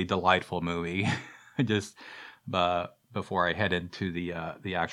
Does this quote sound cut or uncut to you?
uncut